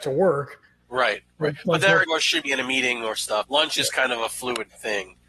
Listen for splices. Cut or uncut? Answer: cut